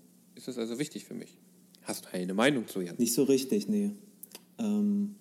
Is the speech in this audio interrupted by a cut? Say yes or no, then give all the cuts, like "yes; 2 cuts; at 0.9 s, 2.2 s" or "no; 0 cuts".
yes; 1 cut; at 2.0 s